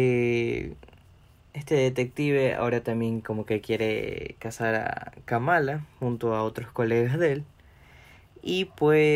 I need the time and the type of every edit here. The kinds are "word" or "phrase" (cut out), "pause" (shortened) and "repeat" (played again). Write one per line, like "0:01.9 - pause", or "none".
none

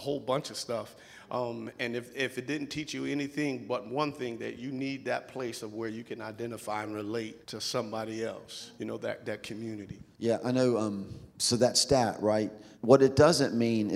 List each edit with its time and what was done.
0:07.4 - pause
0:08.8 - pause
0:10.1 - pause
0:11.3 - pause
0:12.7 - pause

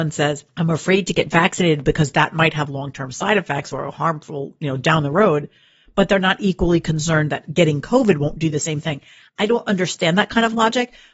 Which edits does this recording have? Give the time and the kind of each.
none

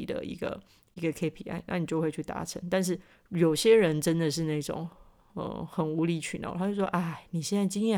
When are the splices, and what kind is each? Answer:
none

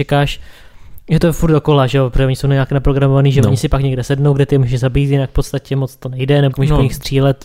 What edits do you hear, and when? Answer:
0:06.5 - word

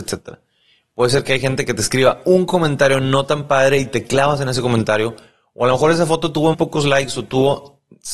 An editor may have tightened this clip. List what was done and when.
0:06.5 - word

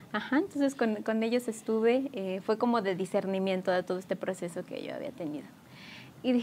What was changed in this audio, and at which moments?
none

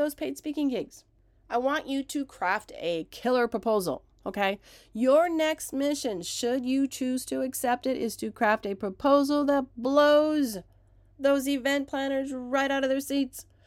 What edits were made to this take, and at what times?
none

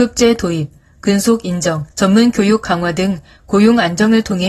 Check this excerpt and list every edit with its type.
0:01.9 - pause

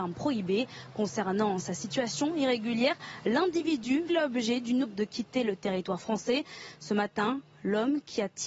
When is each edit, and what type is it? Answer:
0:04.1 - word
0:04.8 - word

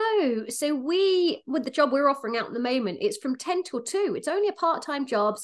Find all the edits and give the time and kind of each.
none

